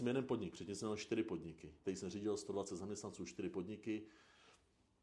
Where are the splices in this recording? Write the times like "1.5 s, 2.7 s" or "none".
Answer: 1.8 s